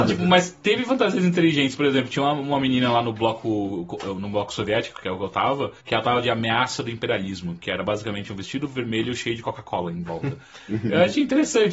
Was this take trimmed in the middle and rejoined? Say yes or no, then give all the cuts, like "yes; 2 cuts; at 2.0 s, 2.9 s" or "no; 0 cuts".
yes; 1 cut; at 5.8 s